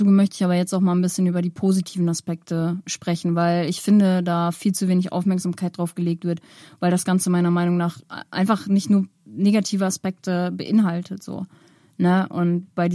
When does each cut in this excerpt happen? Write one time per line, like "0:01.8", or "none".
none